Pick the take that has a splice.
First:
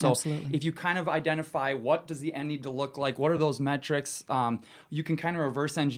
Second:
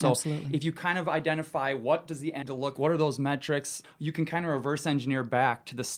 second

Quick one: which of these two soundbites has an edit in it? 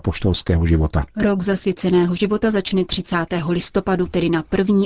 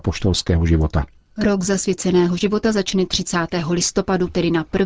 first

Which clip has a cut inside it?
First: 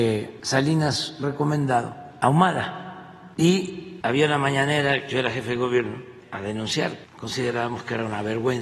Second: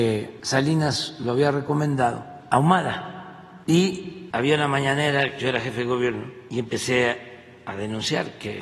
first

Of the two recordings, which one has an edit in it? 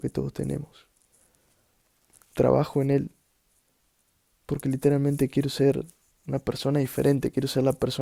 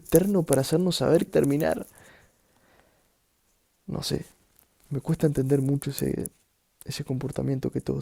second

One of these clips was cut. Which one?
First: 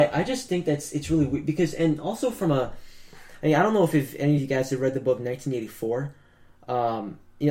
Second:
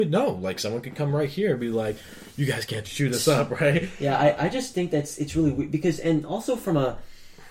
second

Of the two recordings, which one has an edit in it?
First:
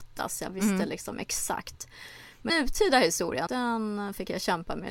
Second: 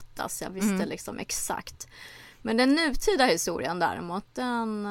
first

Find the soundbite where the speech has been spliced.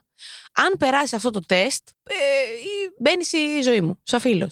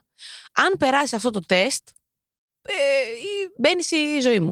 first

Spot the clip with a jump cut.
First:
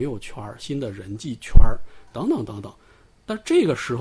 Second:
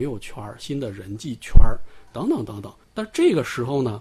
second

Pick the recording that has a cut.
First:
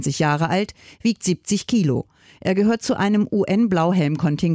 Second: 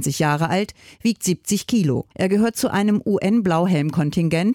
second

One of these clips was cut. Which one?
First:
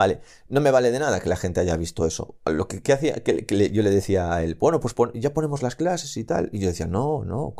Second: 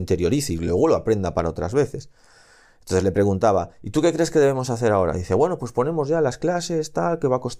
first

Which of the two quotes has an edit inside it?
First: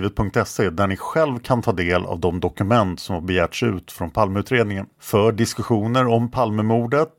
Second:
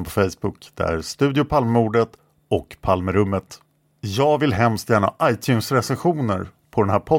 first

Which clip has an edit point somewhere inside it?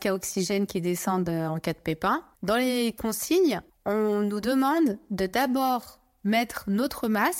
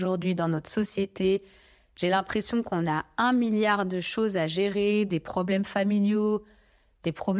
first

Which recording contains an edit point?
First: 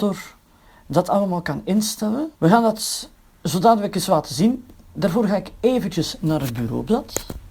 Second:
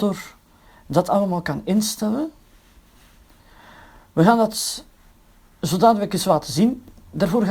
first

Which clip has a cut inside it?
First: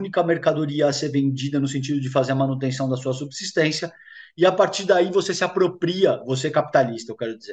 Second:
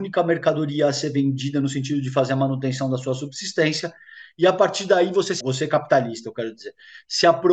second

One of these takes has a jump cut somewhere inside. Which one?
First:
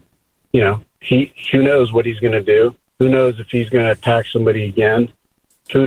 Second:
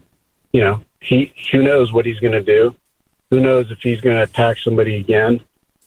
first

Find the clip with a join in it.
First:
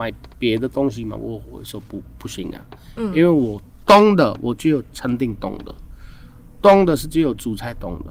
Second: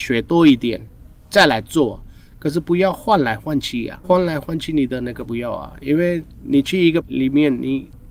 second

